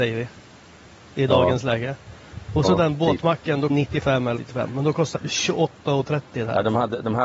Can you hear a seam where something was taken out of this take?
yes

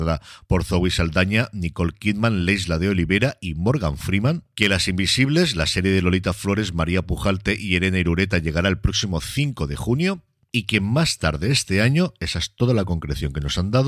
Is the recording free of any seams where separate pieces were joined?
yes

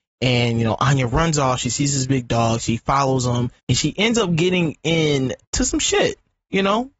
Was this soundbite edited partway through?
yes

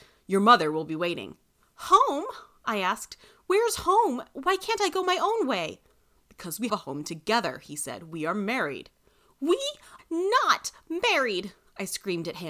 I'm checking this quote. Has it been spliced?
yes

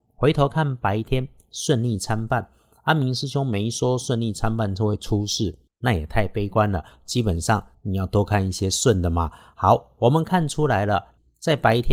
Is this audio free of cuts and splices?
yes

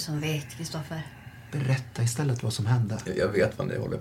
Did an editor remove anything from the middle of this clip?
no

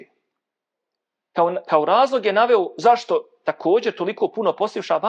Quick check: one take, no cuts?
yes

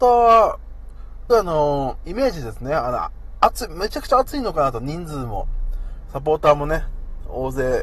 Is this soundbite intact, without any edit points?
no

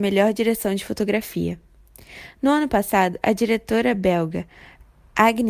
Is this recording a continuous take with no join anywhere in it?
yes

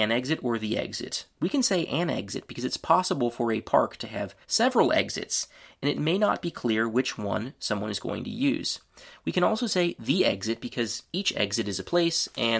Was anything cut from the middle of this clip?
yes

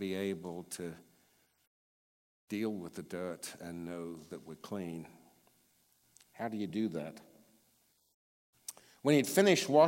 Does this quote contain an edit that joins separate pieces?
no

